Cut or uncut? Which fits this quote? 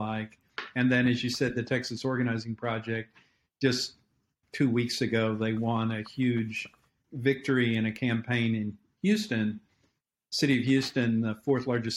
uncut